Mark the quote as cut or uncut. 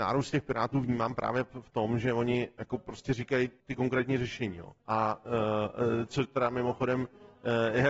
cut